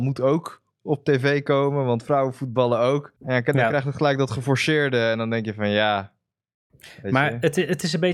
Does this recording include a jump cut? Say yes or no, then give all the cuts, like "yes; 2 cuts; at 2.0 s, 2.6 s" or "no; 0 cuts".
yes; 1 cut; at 3.2 s